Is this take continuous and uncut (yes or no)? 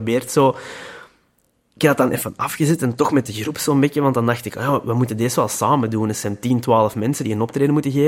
yes